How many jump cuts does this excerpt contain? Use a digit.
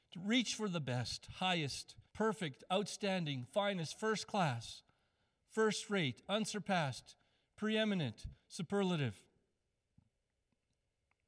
1